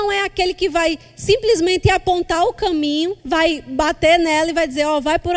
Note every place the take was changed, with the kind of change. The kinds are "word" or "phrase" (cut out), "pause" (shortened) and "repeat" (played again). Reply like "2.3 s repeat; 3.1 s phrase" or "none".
3.2 s pause

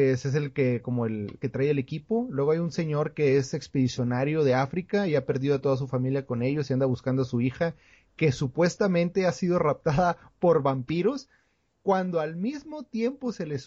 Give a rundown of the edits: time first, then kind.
1.4 s phrase

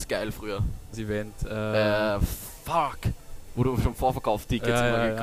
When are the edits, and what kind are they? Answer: 0.9 s phrase

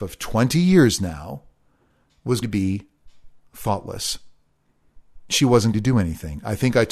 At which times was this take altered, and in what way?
2.4 s word; 5.7 s word

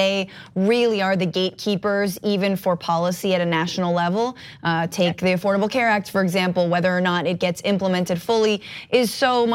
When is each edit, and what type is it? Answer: none

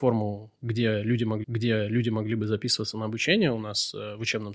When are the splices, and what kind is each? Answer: 1.4 s repeat

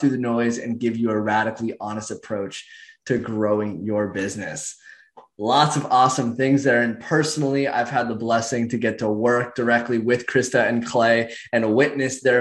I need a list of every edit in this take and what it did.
none

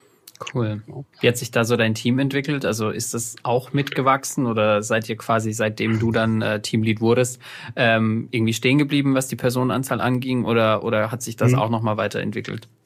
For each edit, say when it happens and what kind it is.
1.1 s pause

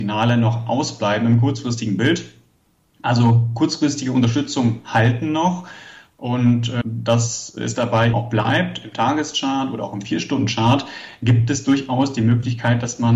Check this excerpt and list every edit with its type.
6.8 s word; 8.1 s word

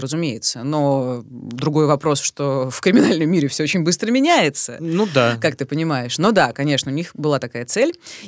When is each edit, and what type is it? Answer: none

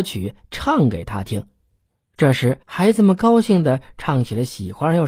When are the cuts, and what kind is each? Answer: 2.6 s pause

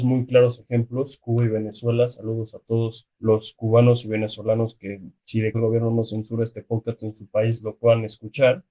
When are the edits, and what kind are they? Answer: 3.1 s pause; 5.5 s word

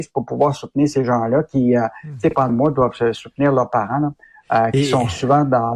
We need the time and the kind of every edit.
2.5 s word

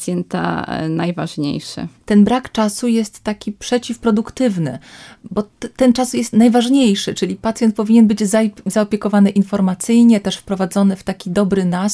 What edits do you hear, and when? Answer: none

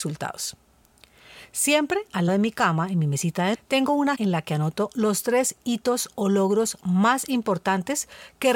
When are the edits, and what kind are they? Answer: 2.3 s word; 3.5 s word; 4.1 s word

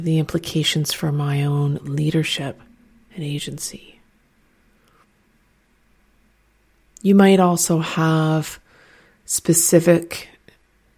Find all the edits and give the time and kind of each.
none

